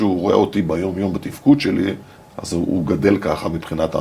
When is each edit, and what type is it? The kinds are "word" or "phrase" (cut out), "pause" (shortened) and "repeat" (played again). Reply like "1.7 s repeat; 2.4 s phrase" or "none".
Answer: 2.1 s pause